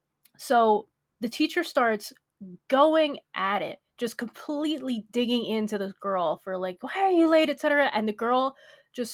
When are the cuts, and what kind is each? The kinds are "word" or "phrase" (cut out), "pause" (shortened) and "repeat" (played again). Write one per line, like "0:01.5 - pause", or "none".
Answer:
none

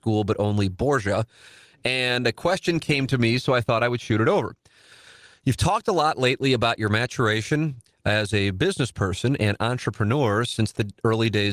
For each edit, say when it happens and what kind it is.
none

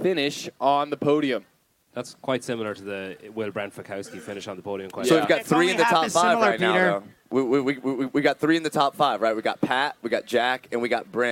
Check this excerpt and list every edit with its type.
0:01.6 - pause

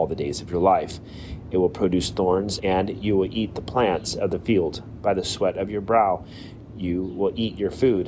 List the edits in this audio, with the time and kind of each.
0:02.6 - phrase

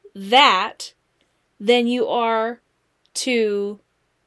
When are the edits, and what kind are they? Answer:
none

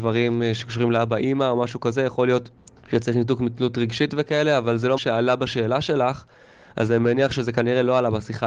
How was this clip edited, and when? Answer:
0:02.6 - pause
0:05.0 - word

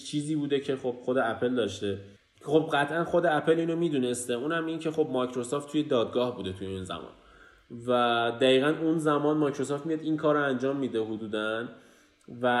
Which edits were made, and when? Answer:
0:02.2 - pause

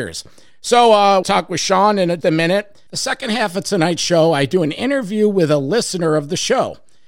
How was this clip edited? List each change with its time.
0:01.2 - phrase
0:02.2 - word
0:02.9 - pause

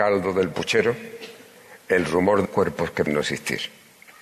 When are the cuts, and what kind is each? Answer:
0:02.5 - word
0:03.1 - word

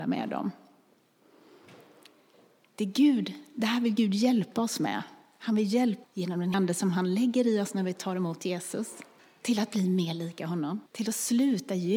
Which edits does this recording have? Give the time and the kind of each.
0:06.0 - word
0:06.5 - word
0:09.2 - pause
0:10.9 - pause

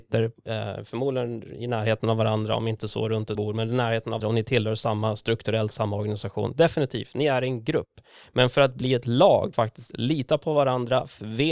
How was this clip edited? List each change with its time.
0:03.3 - word
0:04.2 - word
0:09.5 - word

